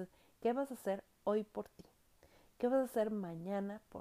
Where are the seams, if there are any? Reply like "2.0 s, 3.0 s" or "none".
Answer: none